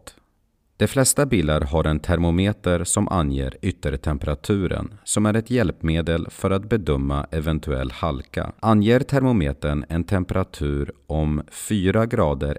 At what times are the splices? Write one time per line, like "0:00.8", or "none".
0:08.6